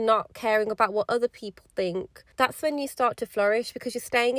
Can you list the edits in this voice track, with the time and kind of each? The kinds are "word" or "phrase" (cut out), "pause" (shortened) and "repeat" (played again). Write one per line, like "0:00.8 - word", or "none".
0:02.3 - pause